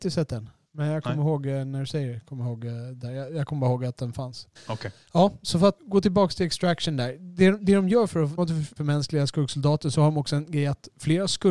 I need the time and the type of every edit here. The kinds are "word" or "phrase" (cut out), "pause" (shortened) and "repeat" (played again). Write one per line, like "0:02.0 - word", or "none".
0:04.6 - pause
0:05.8 - word
0:08.4 - phrase
0:08.8 - word